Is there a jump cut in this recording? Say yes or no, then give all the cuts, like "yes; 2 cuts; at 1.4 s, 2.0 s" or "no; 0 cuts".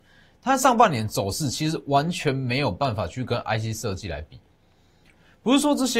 no; 0 cuts